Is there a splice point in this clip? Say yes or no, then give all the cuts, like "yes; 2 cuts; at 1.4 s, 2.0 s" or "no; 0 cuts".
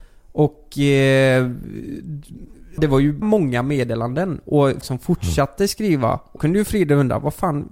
yes; 4 cuts; at 2.8 s, 3.2 s, 4.8 s, 6.4 s